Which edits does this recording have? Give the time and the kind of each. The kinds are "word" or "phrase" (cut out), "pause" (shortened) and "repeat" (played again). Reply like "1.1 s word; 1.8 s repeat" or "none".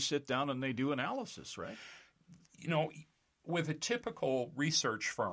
none